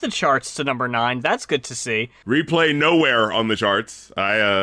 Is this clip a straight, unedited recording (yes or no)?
yes